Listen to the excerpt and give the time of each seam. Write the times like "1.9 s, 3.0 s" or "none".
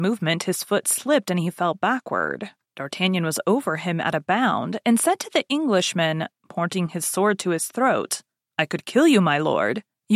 none